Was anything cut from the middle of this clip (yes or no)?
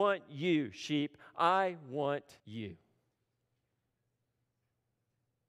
yes